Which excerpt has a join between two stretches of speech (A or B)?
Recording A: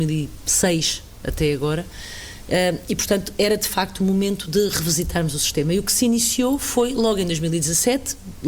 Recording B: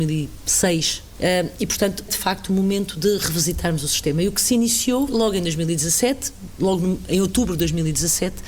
B